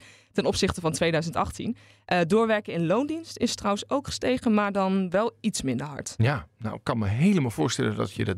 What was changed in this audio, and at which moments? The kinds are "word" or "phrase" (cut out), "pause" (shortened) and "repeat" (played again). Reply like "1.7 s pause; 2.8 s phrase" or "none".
none